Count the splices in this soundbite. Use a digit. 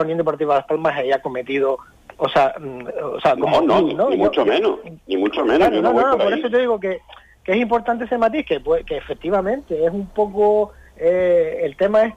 0